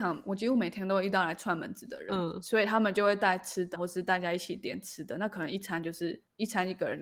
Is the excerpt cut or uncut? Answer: cut